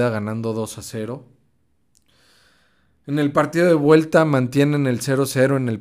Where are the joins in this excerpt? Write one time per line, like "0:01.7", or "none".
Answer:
none